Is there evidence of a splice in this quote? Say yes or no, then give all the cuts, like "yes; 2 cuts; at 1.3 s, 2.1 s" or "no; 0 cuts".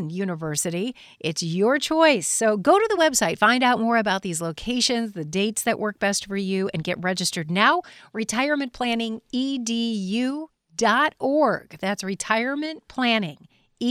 no; 0 cuts